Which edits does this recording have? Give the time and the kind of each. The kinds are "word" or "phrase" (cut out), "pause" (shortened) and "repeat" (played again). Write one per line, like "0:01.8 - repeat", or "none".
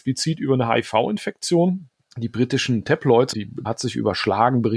0:02.0 - pause
0:03.3 - word
0:03.6 - phrase